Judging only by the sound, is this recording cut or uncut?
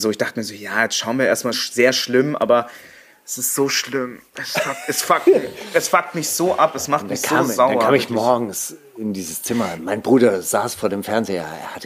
cut